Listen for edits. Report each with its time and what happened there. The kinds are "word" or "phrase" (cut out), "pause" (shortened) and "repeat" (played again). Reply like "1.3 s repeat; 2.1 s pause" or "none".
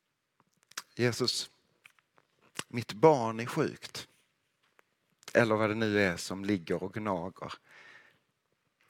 none